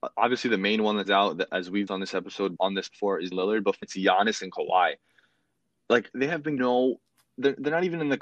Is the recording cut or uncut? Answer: cut